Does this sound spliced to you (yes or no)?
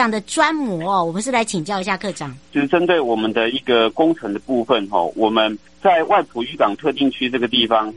yes